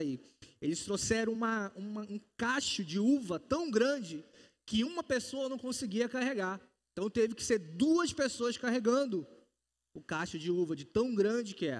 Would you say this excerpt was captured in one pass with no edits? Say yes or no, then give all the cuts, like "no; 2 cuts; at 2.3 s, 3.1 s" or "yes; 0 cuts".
yes; 0 cuts